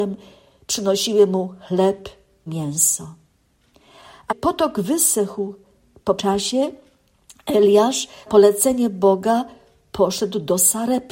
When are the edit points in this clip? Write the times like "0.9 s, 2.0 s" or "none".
2.5 s, 4.3 s, 6.2 s, 8.3 s